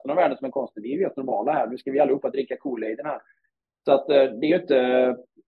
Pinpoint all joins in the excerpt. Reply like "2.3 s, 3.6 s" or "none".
none

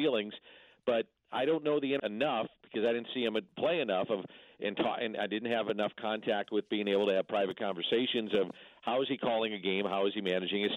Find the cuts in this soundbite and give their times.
2.0 s

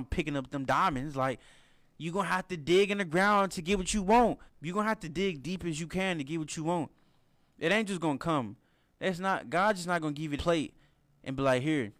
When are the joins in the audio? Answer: 4.5 s, 10.4 s

